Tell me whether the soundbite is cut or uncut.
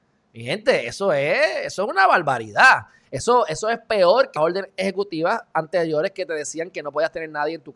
cut